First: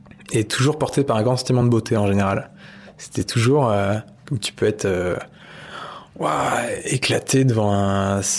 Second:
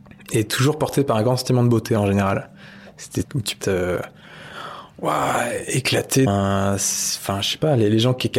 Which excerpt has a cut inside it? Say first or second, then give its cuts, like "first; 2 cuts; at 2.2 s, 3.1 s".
second; 3 cuts; at 3.2 s, 3.6 s, 6.3 s